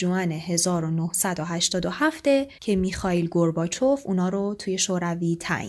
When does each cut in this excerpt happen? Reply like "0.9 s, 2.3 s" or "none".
2.6 s